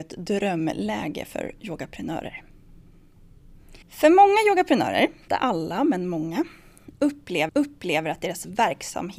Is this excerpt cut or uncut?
cut